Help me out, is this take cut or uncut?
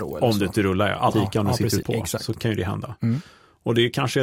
cut